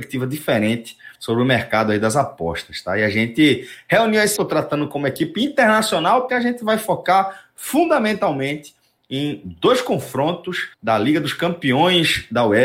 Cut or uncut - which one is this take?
cut